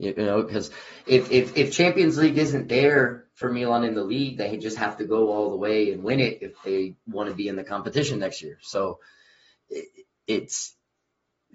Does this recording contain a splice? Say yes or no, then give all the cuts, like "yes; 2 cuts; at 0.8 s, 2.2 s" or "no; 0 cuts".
no; 0 cuts